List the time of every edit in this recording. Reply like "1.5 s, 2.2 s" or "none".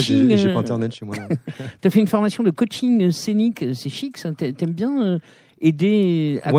none